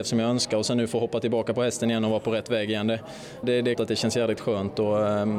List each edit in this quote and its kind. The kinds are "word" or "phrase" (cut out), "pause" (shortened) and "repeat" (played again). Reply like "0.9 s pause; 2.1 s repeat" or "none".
3.4 s word; 3.8 s word